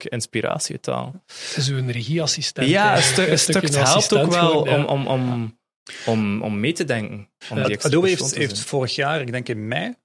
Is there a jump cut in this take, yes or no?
no